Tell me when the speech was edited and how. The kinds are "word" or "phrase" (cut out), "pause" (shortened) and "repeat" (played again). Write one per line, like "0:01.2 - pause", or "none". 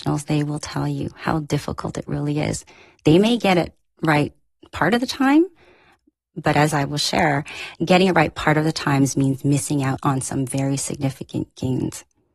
none